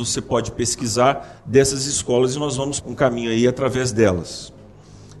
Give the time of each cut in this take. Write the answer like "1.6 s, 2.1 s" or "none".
2.8 s